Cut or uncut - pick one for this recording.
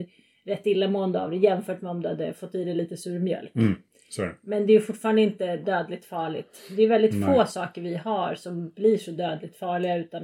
uncut